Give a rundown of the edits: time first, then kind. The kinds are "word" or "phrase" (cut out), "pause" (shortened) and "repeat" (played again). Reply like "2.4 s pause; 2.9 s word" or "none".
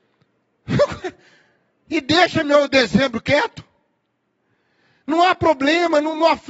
none